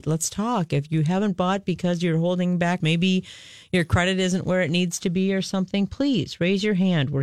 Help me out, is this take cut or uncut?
cut